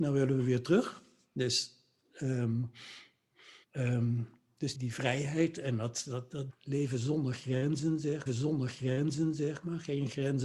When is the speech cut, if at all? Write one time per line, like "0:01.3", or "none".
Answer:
0:03.6
0:04.7
0:06.5
0:08.3